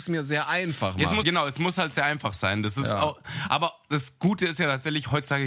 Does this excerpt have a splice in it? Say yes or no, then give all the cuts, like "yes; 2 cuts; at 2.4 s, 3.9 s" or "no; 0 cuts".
yes; 1 cut; at 1.2 s